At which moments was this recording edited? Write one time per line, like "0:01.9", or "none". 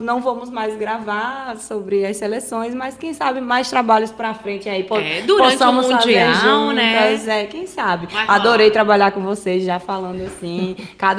none